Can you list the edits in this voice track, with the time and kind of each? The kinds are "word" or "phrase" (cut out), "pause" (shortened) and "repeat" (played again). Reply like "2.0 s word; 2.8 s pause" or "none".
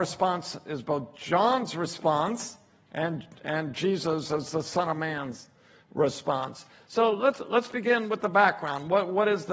none